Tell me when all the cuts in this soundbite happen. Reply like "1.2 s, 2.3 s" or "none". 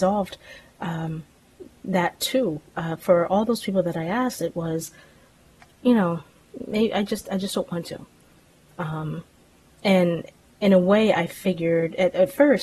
none